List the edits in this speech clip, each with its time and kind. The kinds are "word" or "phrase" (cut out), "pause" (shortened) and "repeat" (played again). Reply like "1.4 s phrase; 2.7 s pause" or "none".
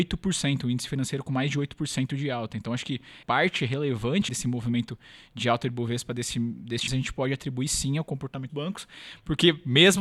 3.2 s word; 4.3 s word; 6.9 s word; 8.5 s word